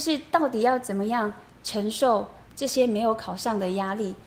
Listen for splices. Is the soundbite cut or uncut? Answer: cut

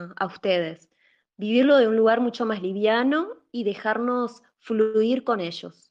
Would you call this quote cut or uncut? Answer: uncut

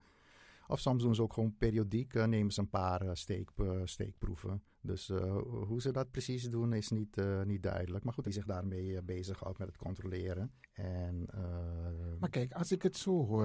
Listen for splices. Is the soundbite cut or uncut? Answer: cut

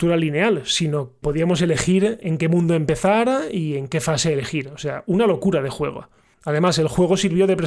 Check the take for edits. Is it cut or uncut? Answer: cut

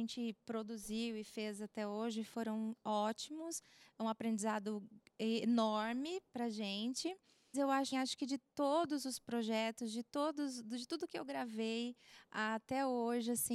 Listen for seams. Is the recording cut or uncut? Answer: cut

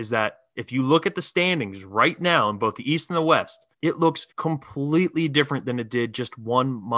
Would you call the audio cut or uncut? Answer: cut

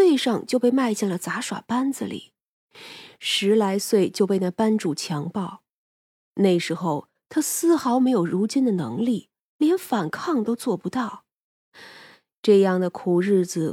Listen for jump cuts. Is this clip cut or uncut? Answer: uncut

